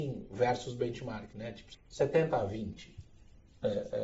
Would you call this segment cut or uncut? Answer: cut